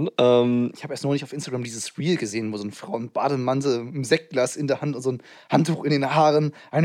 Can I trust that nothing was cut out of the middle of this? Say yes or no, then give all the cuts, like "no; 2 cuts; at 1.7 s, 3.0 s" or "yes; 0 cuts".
yes; 0 cuts